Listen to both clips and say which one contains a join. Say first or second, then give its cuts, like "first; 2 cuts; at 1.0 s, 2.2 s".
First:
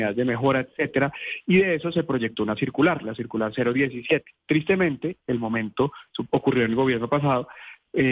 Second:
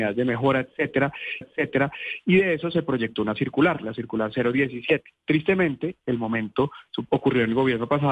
second; 1 cut; at 1.4 s